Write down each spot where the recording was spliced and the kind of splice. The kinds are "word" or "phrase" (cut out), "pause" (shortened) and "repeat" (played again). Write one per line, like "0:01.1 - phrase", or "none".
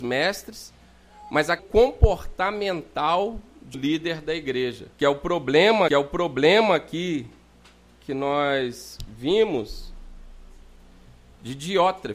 0:01.6 - phrase
0:03.7 - word
0:04.9 - pause
0:05.9 - repeat